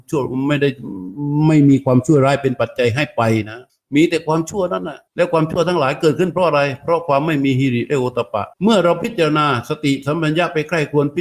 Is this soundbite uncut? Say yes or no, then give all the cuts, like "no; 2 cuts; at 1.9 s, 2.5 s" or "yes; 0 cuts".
no; 3 cuts; at 3.7 s, 5.1 s, 8.5 s